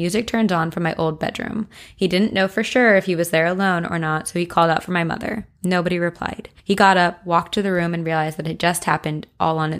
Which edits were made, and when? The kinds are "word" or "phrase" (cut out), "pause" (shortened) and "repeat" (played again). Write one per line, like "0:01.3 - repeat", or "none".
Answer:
0:06.6 - pause